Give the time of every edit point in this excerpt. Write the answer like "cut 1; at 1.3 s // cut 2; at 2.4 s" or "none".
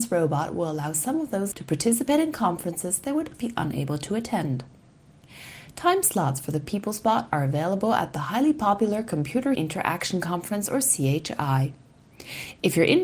cut 1; at 1.5 s // cut 2; at 3.3 s // cut 3; at 9.6 s